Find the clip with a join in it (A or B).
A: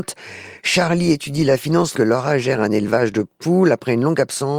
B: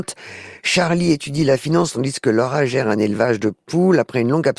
A